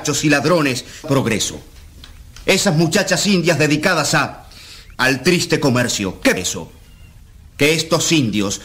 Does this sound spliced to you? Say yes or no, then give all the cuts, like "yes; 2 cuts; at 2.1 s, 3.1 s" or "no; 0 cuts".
yes; 3 cuts; at 1.0 s, 4.9 s, 6.4 s